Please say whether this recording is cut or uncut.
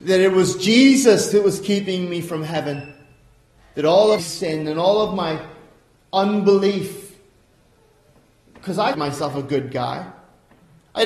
cut